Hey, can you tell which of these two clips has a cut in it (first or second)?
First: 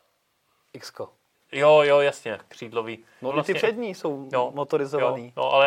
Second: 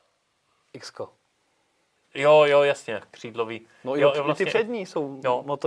first